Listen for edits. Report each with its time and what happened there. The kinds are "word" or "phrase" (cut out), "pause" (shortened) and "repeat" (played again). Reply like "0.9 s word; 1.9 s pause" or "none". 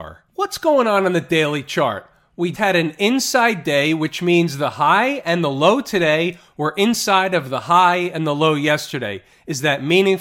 2.5 s word